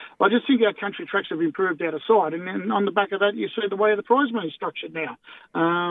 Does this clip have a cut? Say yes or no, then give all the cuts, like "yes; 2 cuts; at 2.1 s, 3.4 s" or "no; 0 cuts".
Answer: no; 0 cuts